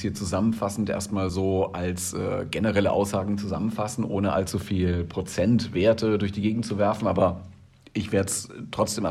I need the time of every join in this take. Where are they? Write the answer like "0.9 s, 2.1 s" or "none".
none